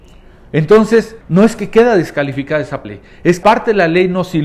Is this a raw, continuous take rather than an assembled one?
no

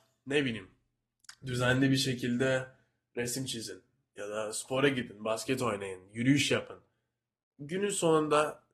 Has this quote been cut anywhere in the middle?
no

